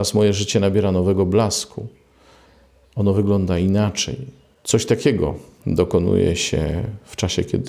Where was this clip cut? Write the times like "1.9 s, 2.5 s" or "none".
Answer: none